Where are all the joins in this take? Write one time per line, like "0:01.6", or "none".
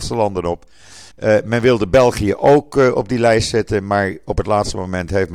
0:01.1